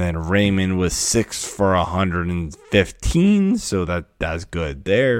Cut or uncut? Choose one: uncut